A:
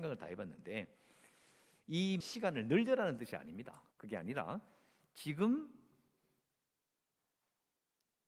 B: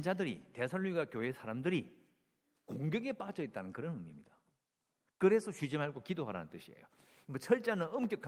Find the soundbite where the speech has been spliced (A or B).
A